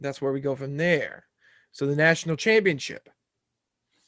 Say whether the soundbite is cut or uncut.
uncut